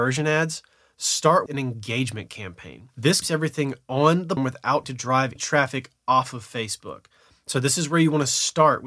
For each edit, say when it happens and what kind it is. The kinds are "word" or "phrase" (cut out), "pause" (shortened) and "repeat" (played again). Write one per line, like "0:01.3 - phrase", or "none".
0:01.5 - word
0:03.2 - word
0:04.4 - word
0:04.8 - word
0:05.4 - word